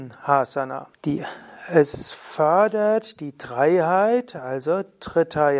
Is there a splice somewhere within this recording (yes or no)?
yes